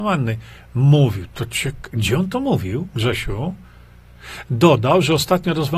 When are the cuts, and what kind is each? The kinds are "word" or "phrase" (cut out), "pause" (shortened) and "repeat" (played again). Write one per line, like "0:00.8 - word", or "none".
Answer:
none